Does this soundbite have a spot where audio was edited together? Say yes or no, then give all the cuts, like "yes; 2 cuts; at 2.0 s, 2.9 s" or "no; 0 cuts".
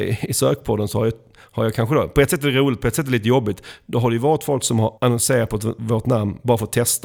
yes; 1 cut; at 5.0 s